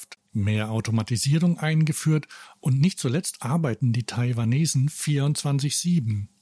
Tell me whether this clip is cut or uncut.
uncut